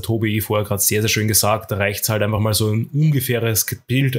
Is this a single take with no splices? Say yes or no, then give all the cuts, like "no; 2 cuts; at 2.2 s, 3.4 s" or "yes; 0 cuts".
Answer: yes; 0 cuts